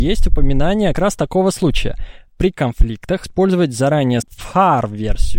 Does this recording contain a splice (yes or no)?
yes